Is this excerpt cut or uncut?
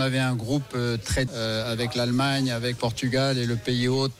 cut